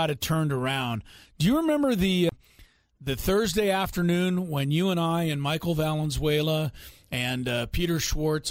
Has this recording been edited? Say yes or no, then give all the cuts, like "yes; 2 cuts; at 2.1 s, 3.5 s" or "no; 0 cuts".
no; 0 cuts